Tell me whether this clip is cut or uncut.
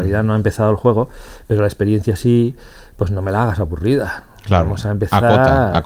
uncut